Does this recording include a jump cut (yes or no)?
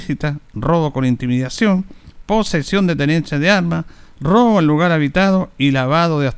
no